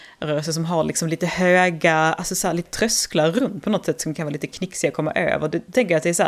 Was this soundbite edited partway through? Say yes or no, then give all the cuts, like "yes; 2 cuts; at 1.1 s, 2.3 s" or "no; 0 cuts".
yes; 2 cuts; at 2.6 s, 3.6 s